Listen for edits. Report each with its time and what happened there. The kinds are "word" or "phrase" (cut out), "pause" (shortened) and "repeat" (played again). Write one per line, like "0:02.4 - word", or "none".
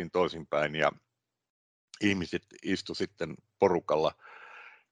none